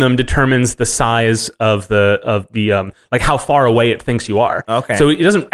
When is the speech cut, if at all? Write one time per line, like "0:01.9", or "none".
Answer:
none